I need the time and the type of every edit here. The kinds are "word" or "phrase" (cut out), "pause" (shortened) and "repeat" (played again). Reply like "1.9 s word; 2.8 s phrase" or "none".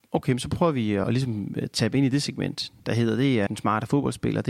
1.0 s word; 2.8 s pause; 3.5 s word